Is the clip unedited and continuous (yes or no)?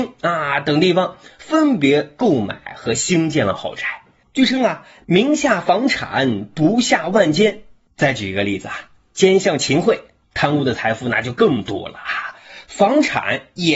yes